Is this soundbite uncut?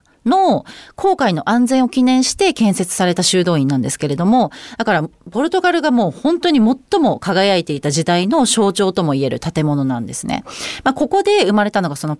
yes; 0 cuts

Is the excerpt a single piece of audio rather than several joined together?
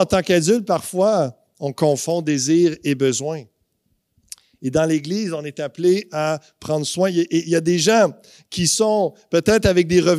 yes; 0 cuts

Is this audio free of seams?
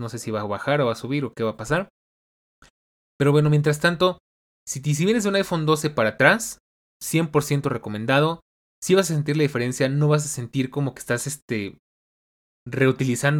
yes; 0 cuts

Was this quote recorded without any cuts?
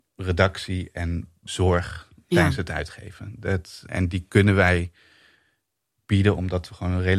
no; 1 cut; at 3.9 s

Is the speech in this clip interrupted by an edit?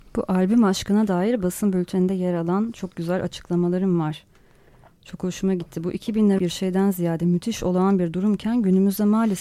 yes; 1 cut; at 6.4 s

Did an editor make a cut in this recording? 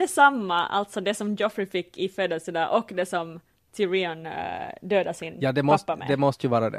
no; 0 cuts

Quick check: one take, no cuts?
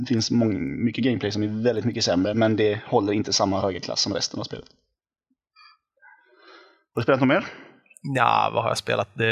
yes; 0 cuts

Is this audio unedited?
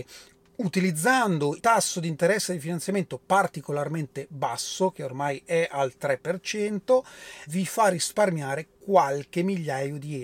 no; 2 cuts; at 1.6 s, 7.5 s

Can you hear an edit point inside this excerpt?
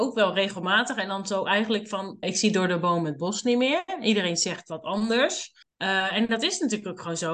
yes; 2 cuts; at 2.2 s, 5.6 s

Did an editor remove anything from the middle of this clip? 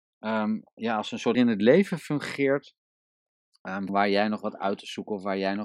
yes; 2 cuts; at 1.3 s, 3.9 s

